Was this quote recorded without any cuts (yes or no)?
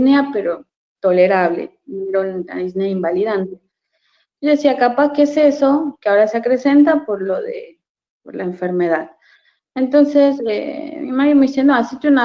yes